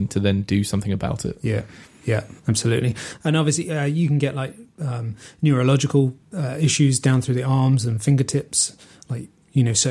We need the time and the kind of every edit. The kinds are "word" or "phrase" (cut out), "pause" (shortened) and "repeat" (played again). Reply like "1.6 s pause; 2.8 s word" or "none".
2.4 s pause; 6.2 s pause